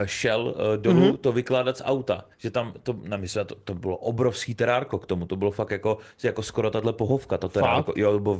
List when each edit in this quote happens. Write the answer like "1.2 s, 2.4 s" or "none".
2.3 s

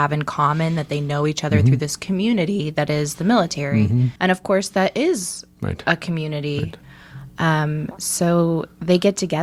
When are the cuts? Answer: 4.2 s

